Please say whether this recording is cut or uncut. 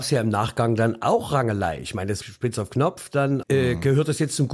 cut